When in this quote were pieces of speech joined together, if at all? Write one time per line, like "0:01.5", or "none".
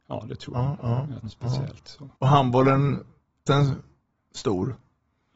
0:01.2
0:02.2
0:03.5